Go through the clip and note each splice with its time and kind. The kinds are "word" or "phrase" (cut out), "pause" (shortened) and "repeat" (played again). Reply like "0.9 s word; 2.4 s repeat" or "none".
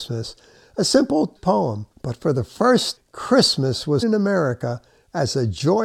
1.4 s word; 1.9 s pause; 3.0 s word; 4.0 s word